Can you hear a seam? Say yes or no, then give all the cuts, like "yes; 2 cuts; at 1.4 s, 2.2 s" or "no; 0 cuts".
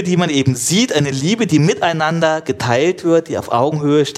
no; 0 cuts